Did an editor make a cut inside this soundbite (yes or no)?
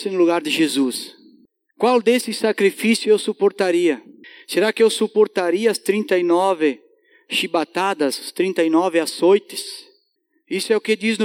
no